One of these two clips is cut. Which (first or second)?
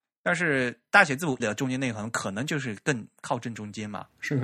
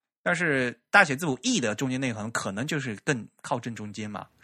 first